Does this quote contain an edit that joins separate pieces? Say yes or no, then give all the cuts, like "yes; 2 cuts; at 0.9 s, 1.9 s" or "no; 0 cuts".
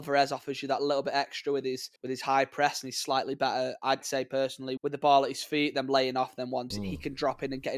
yes; 4 cuts; at 2.0 s, 4.0 s, 4.8 s, 6.7 s